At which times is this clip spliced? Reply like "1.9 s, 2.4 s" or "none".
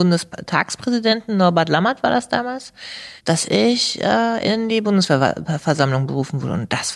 3.2 s